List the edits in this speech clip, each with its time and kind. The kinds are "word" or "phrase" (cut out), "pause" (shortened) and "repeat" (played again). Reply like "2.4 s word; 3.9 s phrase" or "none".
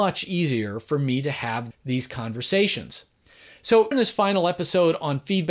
1.7 s word; 3.9 s word